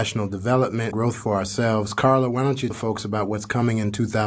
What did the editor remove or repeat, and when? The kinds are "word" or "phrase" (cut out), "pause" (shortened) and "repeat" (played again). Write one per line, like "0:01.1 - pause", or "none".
0:00.9 - word
0:02.7 - word